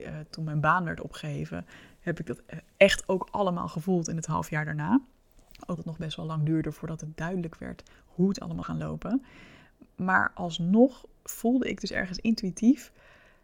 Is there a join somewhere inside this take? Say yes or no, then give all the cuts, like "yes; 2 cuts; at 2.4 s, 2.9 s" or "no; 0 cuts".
yes; 2 cuts; at 5.8 s, 8.6 s